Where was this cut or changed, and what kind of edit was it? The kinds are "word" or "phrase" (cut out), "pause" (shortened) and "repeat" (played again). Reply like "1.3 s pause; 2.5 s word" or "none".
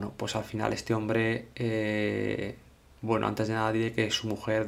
none

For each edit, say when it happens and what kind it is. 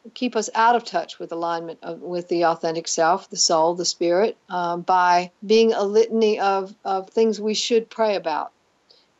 5.4 s pause

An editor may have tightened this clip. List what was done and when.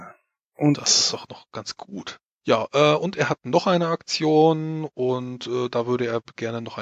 none

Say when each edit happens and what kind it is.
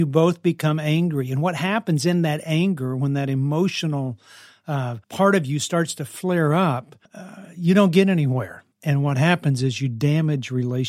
5.0 s pause; 7.1 s pause; 8.7 s pause

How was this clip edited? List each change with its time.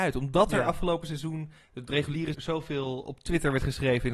2.3 s word

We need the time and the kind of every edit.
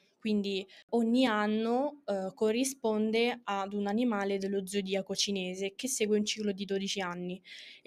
none

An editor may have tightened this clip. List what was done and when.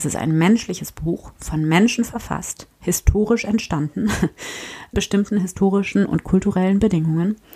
4.9 s word

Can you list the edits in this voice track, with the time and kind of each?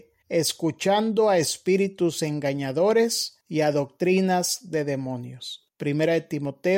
3.4 s pause

